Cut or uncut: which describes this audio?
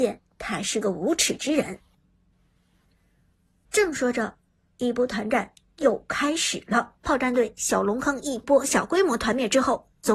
cut